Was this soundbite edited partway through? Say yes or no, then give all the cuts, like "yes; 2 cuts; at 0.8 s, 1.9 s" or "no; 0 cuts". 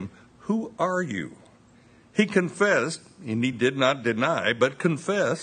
no; 0 cuts